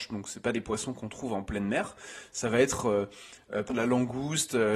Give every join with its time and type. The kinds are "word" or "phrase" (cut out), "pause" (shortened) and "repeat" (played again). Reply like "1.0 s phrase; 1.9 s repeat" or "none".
3.7 s word